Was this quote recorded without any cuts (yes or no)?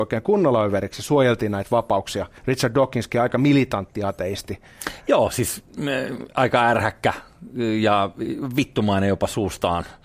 no